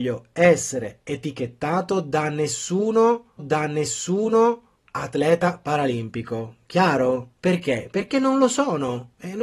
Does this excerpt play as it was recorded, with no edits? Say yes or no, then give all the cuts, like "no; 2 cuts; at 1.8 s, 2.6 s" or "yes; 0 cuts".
no; 2 cuts; at 3.4 s, 7.4 s